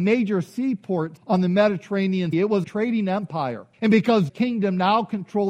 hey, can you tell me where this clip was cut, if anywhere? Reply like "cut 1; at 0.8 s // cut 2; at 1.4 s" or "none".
cut 1; at 1.2 s // cut 2; at 2.3 s // cut 3; at 2.6 s // cut 4; at 3.7 s // cut 5; at 4.3 s